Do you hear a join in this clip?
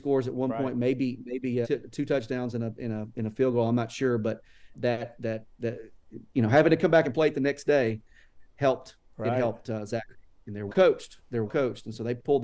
yes; 4 cuts; at 1.6 s, 4.7 s, 10.7 s, 11.5 s

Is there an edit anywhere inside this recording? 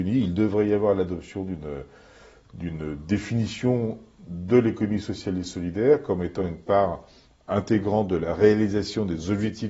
no; 0 cuts

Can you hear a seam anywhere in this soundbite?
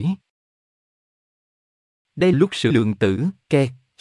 yes; 2 cuts; at 2.3 s, 2.7 s

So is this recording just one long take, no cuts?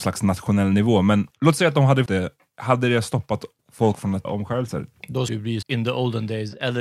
no; 6 cuts; at 1.3 s, 2.1 s, 3.6 s, 4.2 s, 5.3 s, 5.6 s

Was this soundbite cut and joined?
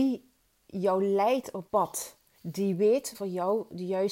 yes; 3 cuts; at 1.7 s, 2.4 s, 3.1 s

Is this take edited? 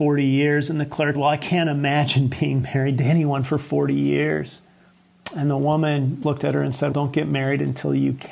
yes; 3 cuts; at 1.2 s, 6.2 s, 6.9 s

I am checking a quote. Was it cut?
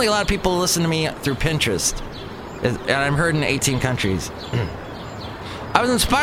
no; 0 cuts

